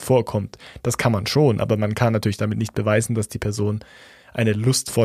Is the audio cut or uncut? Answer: uncut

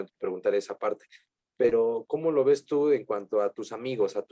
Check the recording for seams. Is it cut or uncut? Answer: uncut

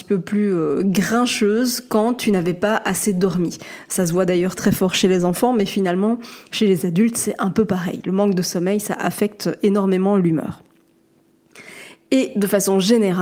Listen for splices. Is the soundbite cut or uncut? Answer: cut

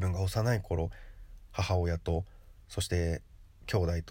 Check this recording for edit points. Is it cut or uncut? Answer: cut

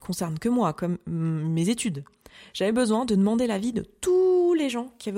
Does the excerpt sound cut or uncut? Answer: uncut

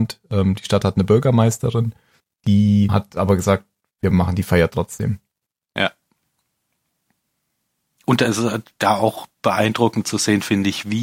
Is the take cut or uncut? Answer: uncut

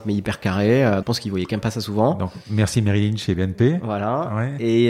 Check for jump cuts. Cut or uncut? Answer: cut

